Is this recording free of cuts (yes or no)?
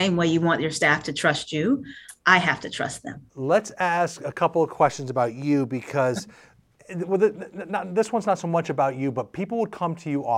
yes